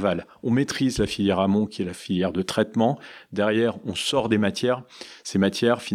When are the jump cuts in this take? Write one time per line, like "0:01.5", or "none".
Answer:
none